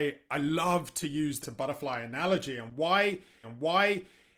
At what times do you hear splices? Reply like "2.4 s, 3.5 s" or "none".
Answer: 1.4 s, 3.4 s